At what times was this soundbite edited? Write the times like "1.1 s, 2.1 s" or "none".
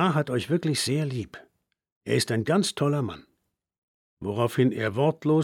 none

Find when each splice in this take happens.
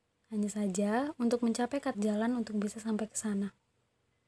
1.9 s

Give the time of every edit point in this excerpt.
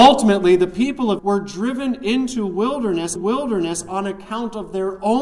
1.2 s, 3.2 s

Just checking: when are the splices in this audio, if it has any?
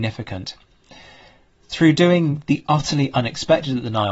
none

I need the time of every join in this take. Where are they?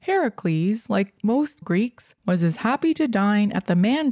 1.6 s, 2.2 s

